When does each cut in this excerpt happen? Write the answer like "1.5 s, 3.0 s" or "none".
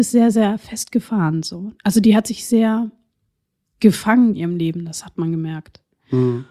4.3 s